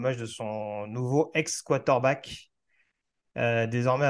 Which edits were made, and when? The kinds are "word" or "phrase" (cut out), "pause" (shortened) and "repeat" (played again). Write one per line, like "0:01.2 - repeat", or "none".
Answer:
none

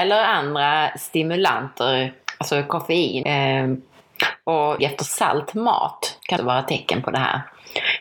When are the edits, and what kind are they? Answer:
0:03.2 - word
0:04.8 - word
0:06.4 - word

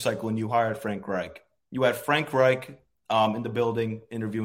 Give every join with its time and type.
none

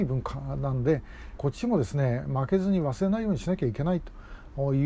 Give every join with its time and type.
0:01.4 - phrase

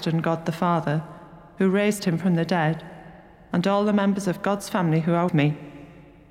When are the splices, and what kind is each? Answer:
0:05.3 - word

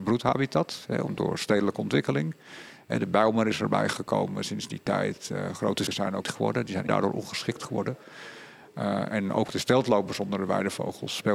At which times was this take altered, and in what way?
0:05.9 - word
0:06.2 - word
0:06.9 - phrase
0:09.1 - word

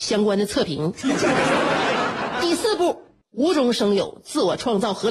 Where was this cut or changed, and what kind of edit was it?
0:03.2 - pause

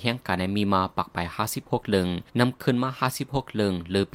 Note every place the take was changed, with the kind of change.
0:02.3 - pause

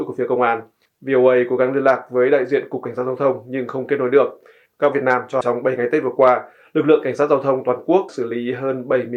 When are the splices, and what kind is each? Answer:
0:04.9 - word
0:05.4 - word
0:08.1 - word

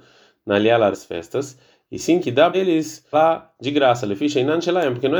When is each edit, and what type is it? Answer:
0:00.9 - word
0:02.2 - word
0:02.5 - word
0:03.1 - word

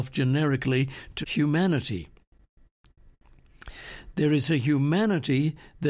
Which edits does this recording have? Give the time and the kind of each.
0:01.2 - word

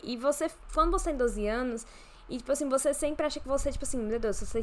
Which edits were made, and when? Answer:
none

